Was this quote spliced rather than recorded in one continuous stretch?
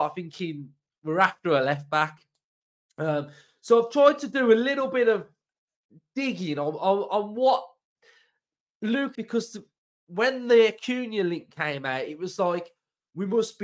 yes; 1 cut; at 9.1 s

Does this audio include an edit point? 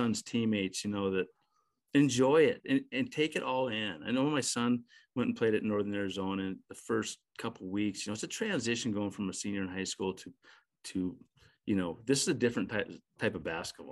no; 0 cuts

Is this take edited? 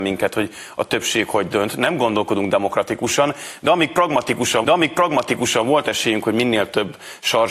yes; 1 cut; at 4.6 s

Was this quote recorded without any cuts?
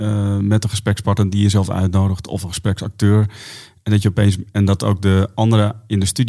yes; 0 cuts

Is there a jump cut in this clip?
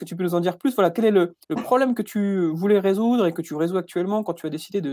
yes; 1 cut; at 1.4 s

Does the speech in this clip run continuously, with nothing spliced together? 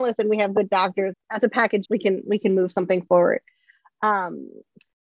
no; 2 cuts; at 1.1 s, 1.9 s

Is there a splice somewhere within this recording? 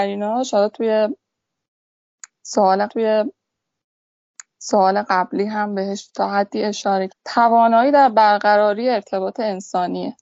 yes; 2 cuts; at 2.9 s, 7.1 s

